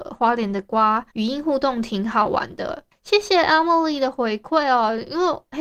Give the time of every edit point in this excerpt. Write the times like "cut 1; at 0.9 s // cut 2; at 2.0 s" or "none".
cut 1; at 1.1 s